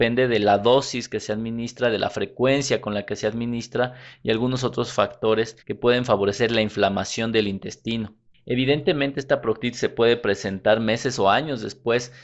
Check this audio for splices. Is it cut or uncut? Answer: cut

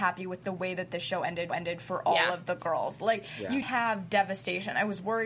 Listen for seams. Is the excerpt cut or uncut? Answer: cut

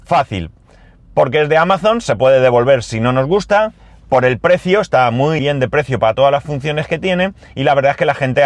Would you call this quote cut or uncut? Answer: cut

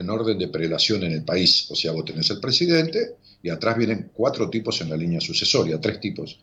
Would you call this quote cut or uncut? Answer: uncut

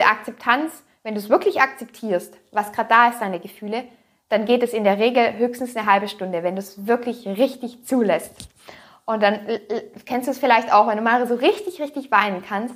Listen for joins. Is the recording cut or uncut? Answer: uncut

